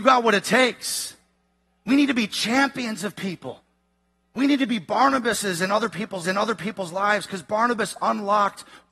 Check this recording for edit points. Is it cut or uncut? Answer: cut